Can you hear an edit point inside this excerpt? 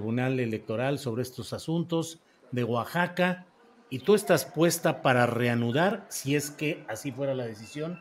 no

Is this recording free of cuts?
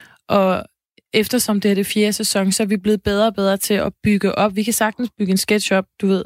yes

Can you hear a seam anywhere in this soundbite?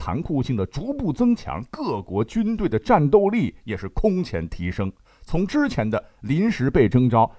yes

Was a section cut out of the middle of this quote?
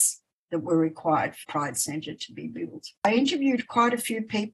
yes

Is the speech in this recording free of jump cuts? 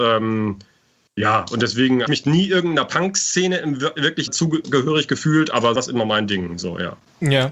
no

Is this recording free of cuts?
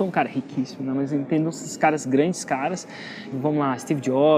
no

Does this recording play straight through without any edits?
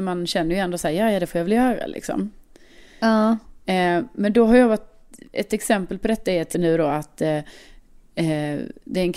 no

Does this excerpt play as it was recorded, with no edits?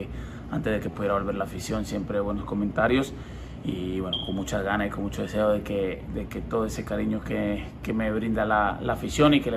yes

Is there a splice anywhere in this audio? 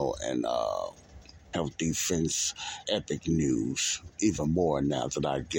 yes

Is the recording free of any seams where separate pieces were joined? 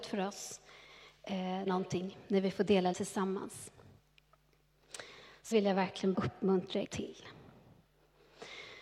no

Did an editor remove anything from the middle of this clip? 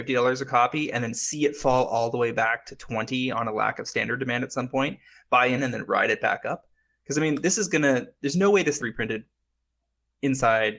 yes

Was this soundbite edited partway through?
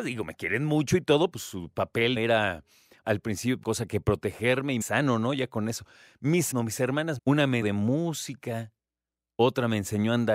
yes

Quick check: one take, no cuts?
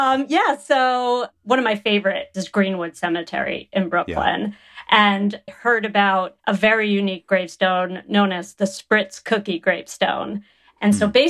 no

